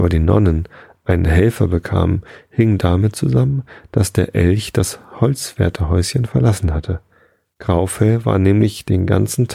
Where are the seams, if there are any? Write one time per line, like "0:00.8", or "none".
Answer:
none